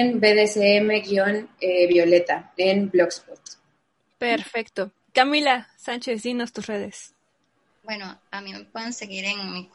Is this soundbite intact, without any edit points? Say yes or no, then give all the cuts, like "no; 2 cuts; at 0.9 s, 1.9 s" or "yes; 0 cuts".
yes; 0 cuts